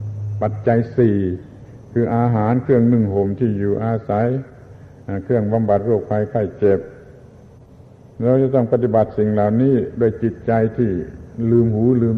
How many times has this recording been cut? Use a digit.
0